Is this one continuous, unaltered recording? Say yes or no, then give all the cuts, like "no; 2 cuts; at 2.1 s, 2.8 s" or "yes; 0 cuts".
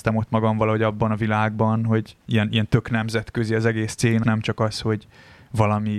no; 2 cuts; at 2.2 s, 4.2 s